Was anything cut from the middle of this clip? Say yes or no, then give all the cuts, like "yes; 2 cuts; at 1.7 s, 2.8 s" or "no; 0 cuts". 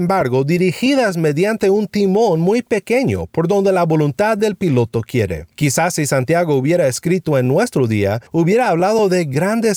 yes; 2 cuts; at 5.5 s, 8.3 s